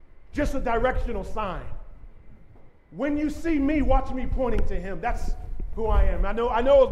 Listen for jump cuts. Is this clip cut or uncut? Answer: uncut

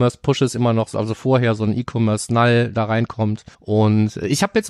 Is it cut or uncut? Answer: cut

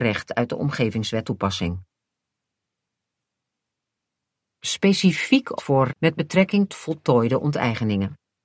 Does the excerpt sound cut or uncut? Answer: cut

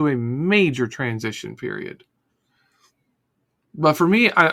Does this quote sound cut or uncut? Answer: uncut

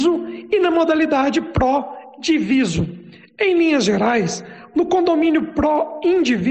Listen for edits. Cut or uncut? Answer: uncut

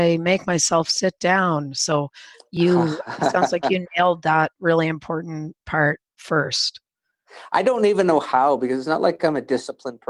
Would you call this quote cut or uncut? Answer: uncut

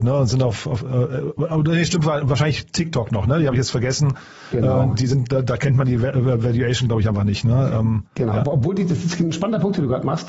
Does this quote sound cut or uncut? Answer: uncut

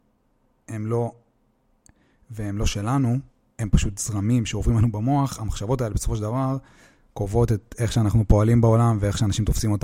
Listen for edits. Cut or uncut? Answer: uncut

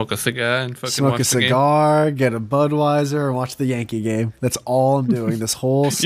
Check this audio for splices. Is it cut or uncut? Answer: uncut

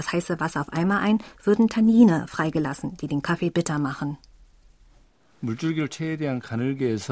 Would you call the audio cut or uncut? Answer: uncut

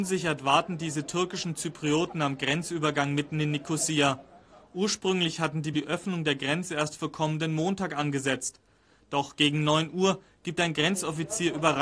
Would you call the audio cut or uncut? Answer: cut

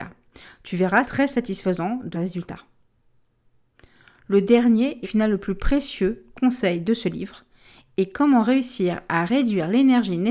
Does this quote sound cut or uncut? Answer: cut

